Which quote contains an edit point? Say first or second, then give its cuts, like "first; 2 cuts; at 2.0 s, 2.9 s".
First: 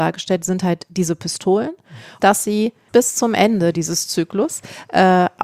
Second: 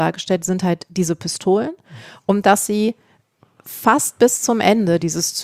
first; 2 cuts; at 2.2 s, 2.9 s